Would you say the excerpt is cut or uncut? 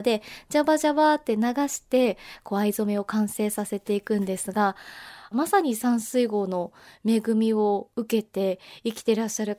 uncut